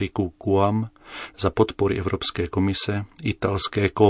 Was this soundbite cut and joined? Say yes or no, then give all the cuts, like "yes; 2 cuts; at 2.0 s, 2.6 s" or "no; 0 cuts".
no; 0 cuts